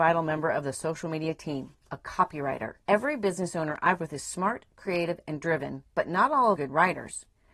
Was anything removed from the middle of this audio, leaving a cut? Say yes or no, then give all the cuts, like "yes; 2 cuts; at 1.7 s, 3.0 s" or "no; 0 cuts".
yes; 5 cuts; at 1.8 s, 2.8 s, 4.0 s, 5.9 s, 6.5 s